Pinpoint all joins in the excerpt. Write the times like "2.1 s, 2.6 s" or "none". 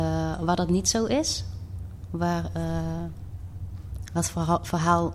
4.2 s